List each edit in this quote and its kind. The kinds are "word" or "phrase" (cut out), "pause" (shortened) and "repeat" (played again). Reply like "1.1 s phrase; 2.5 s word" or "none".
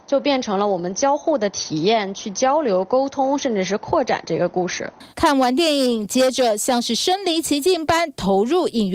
5.1 s pause